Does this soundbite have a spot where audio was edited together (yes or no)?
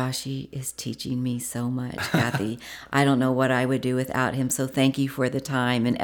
no